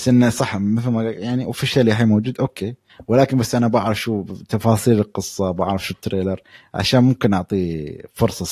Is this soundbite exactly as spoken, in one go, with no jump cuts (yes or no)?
yes